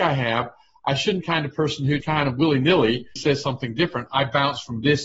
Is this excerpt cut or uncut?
cut